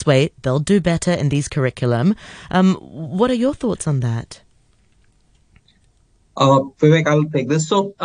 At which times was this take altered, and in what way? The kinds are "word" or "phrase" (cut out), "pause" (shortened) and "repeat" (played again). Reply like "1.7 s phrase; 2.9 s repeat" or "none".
none